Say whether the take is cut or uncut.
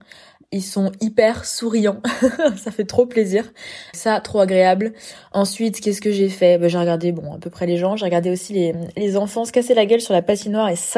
uncut